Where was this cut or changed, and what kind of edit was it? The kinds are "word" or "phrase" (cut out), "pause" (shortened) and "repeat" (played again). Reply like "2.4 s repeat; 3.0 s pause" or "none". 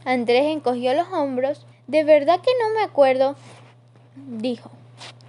1.7 s pause